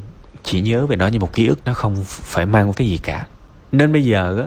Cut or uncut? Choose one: cut